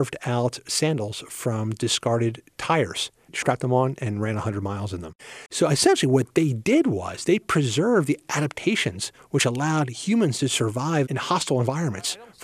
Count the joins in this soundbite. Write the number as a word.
one